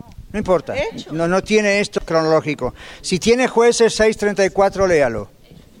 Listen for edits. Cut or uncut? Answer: cut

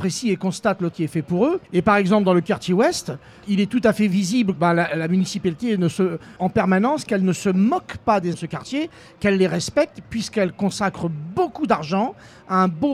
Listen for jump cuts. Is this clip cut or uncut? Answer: cut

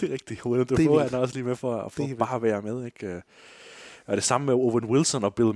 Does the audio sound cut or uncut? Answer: uncut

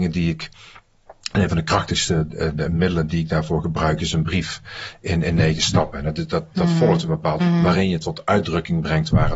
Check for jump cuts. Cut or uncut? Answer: cut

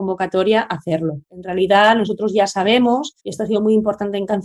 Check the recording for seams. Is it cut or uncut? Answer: cut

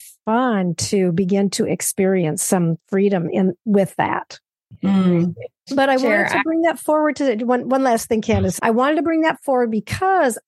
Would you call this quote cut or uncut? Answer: cut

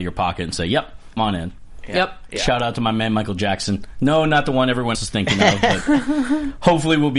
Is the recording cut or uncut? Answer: cut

